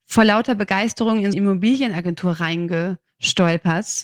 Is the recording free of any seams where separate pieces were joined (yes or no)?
no